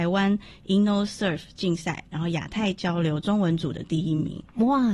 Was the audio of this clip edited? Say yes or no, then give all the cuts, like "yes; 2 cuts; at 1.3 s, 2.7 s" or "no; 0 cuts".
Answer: no; 0 cuts